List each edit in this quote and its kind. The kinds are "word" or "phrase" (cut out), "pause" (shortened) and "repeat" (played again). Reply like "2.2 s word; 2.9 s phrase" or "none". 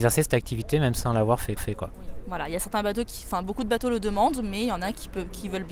1.6 s repeat